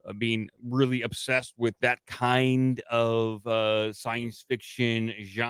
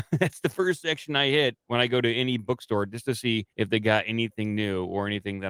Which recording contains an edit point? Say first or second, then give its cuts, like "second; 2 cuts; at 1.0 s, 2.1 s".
second; 2 cuts; at 1.6 s, 3.5 s